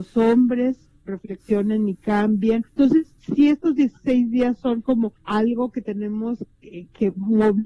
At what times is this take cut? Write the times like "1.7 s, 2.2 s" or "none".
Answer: 2.7 s, 5.2 s